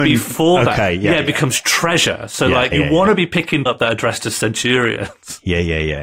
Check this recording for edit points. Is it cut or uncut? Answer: cut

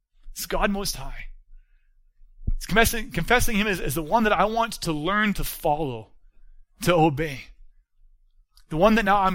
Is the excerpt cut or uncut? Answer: uncut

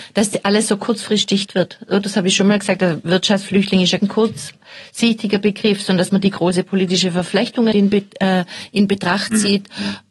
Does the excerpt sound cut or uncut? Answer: cut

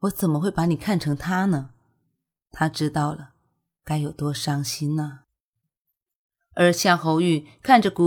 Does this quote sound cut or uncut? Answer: uncut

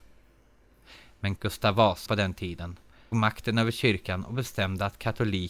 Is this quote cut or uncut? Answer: cut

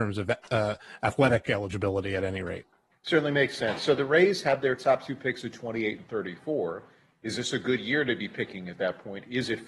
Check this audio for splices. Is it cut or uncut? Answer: uncut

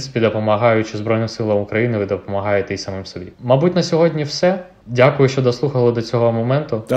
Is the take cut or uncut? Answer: cut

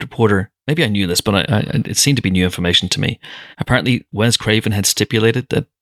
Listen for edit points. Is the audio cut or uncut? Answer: cut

